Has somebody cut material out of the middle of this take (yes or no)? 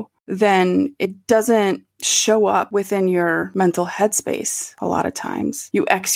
no